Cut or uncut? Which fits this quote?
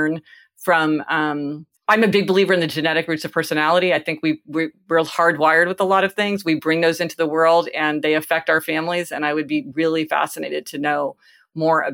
cut